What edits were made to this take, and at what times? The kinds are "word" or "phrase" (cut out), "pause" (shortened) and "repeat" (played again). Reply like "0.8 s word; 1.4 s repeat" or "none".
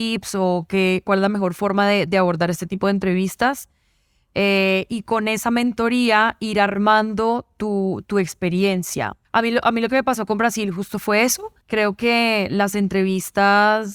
9.2 s pause; 11.6 s pause